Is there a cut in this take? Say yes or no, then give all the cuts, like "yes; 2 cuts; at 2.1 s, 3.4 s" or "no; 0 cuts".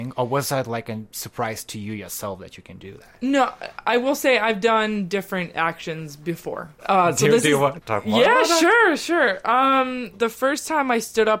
yes; 3 cuts; at 6.8 s, 7.8 s, 10.1 s